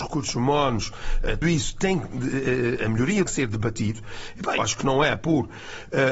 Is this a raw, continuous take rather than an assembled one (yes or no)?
no